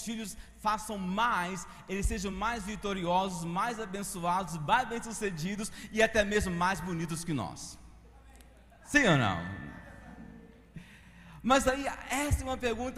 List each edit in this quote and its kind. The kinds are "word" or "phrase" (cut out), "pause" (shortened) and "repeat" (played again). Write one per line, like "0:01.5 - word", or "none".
none